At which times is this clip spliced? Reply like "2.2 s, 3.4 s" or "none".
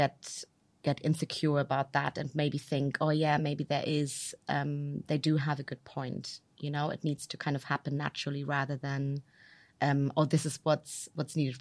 none

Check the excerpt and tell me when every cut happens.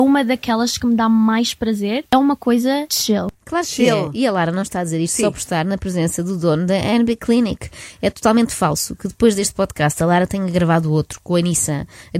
3.4 s

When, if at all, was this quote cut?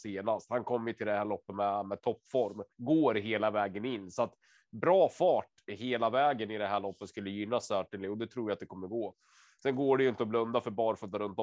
2.7 s

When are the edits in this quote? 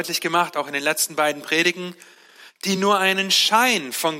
none

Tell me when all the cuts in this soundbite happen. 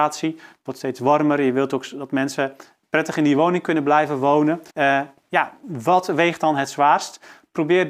4.7 s

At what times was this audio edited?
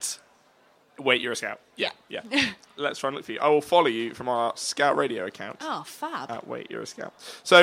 2.8 s

